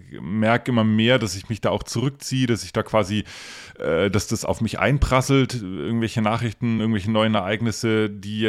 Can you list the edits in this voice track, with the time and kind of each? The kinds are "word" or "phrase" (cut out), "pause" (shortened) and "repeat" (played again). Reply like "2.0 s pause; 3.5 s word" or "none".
none